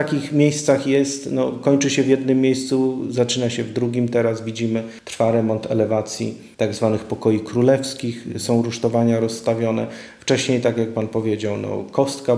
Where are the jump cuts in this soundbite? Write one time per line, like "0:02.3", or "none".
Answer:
none